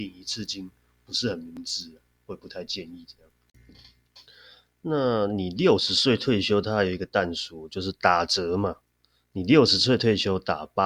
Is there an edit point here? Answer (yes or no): no